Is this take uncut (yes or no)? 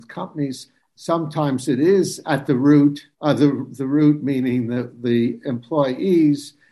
no